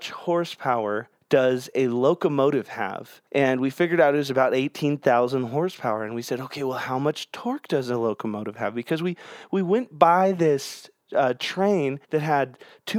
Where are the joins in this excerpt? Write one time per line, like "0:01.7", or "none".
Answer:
0:01.1
0:03.3
0:12.0